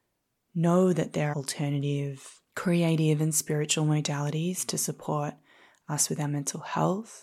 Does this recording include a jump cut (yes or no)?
yes